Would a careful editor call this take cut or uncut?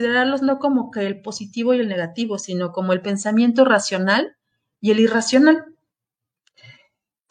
uncut